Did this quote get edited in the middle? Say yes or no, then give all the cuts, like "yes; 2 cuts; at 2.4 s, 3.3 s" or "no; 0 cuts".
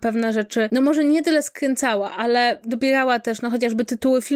no; 0 cuts